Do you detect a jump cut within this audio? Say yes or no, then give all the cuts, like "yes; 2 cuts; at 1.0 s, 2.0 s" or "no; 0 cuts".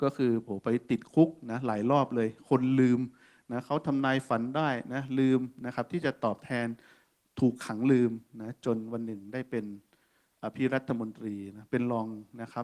no; 0 cuts